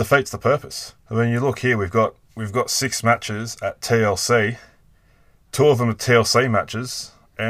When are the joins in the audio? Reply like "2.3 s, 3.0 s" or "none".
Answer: 1.0 s, 2.2 s